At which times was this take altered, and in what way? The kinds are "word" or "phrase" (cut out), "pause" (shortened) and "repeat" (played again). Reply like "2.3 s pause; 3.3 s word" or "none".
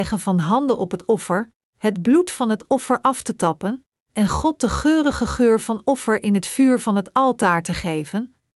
none